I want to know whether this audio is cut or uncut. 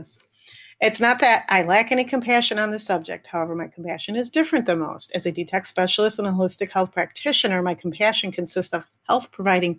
uncut